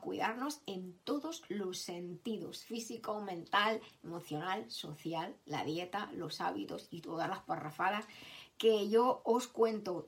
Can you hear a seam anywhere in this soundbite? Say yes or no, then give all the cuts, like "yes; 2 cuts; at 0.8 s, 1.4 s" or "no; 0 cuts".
no; 0 cuts